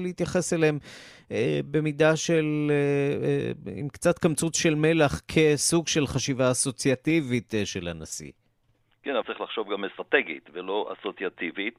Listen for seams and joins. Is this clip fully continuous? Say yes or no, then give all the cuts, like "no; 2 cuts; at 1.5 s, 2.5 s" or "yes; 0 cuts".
no; 1 cut; at 9.2 s